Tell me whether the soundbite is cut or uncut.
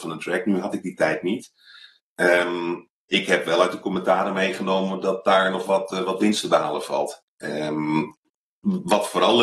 cut